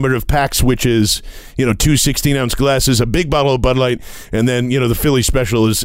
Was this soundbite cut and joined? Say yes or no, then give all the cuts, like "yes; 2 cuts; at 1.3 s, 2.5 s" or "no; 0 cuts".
no; 0 cuts